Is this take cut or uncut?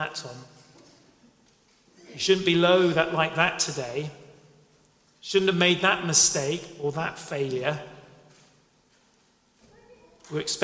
uncut